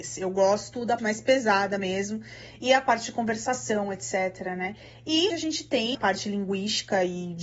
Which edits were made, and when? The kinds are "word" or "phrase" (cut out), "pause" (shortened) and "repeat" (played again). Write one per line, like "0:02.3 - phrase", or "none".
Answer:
0:01.0 - word
0:05.3 - word
0:05.9 - word